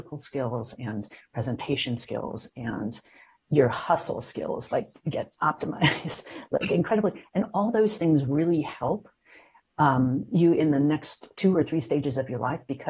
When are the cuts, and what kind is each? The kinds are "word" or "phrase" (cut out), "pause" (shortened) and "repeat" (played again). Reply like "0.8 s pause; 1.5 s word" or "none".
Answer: none

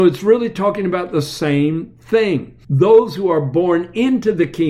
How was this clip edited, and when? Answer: 2.6 s pause

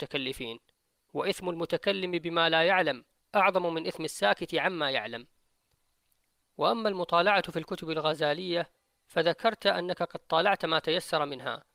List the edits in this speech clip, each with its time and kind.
none

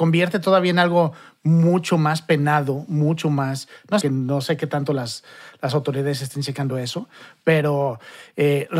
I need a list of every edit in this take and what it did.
4.0 s phrase

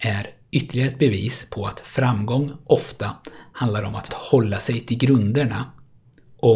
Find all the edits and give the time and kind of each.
4.1 s phrase

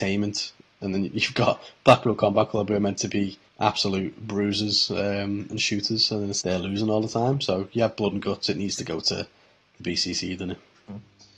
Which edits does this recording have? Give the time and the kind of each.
3.5 s pause; 6.4 s word

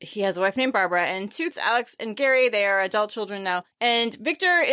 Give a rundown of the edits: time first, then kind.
1.5 s word; 3.7 s pause

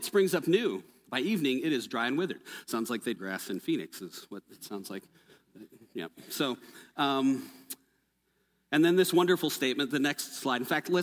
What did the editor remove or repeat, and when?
3.2 s phrase

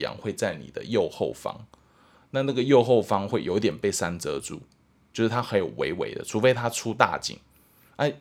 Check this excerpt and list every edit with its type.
none

